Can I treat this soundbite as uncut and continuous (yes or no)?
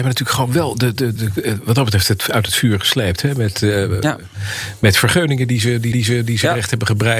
no